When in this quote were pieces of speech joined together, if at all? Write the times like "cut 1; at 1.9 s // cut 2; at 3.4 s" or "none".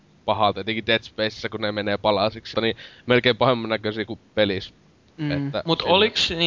cut 1; at 2.5 s